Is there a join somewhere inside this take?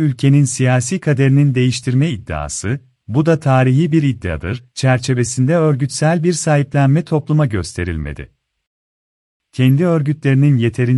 no; 0 cuts

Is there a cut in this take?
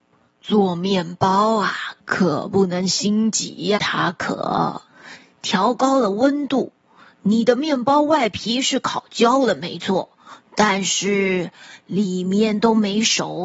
yes; 1 cut; at 3.8 s

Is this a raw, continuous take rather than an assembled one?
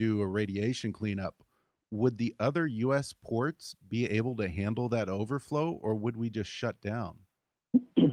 yes; 0 cuts

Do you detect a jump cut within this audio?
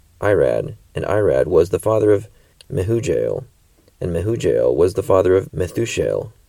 no; 0 cuts

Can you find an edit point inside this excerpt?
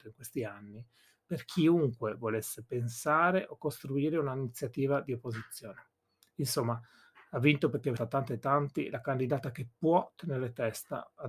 yes; 1 cut; at 8.0 s

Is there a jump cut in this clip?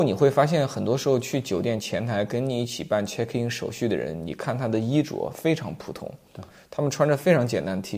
no; 0 cuts

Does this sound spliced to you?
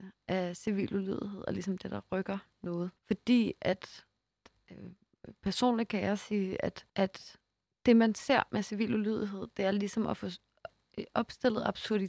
yes; 2 cuts; at 3.0 s, 6.9 s

